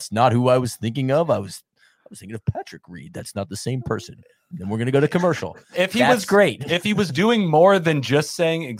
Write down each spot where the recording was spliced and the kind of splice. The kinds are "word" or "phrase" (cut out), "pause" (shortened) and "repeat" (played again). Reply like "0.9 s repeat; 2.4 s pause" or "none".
none